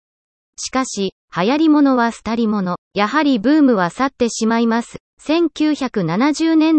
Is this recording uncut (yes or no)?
no